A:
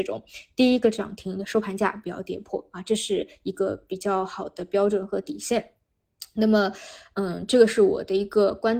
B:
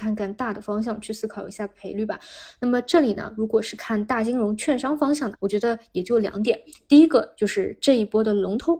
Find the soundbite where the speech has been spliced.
B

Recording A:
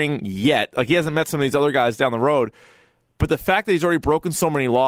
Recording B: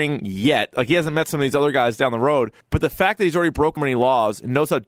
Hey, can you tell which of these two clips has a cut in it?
B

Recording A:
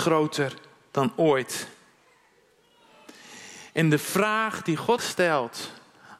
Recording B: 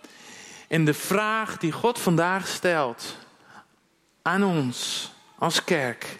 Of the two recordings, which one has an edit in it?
A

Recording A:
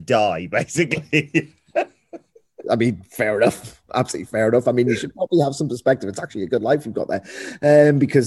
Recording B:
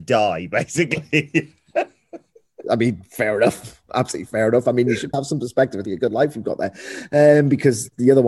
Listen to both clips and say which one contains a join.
B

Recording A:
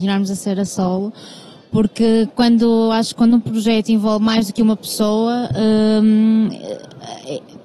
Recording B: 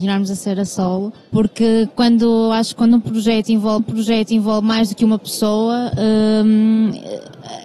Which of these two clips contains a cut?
B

